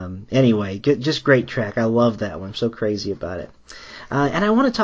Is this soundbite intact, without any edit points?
yes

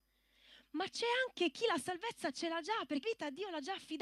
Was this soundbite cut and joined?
yes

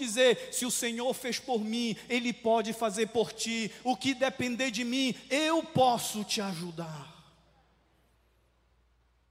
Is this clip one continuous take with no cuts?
yes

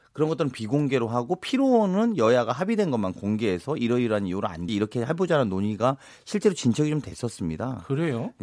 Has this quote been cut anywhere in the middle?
yes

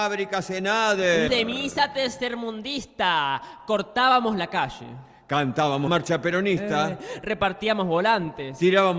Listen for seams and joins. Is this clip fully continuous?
no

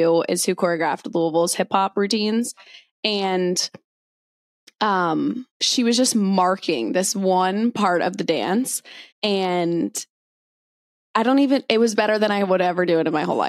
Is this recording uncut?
no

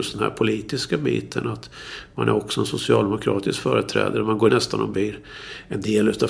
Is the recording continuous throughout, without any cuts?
no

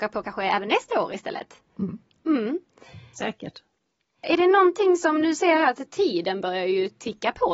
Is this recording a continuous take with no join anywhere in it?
yes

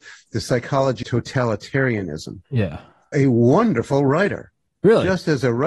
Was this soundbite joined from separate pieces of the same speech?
yes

